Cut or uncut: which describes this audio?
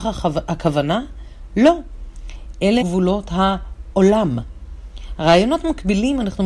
cut